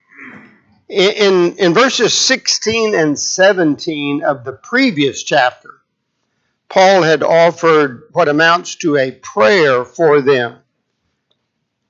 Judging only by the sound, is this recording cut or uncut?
cut